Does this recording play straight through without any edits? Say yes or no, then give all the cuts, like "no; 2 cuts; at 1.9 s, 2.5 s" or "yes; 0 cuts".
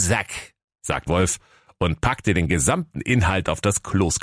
no; 1 cut; at 1.1 s